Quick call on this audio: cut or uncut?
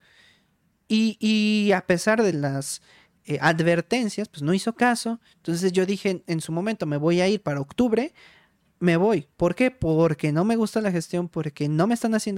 uncut